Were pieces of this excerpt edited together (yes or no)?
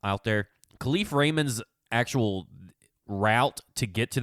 no